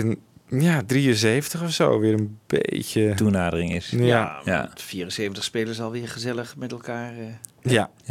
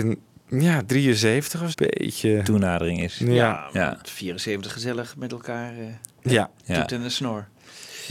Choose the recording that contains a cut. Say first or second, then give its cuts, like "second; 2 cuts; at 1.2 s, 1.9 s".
second; 2 cuts; at 1.7 s, 4.7 s